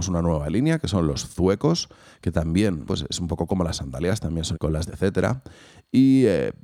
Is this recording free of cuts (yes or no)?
no